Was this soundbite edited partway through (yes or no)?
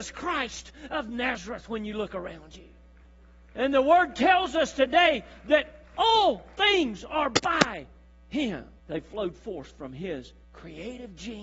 yes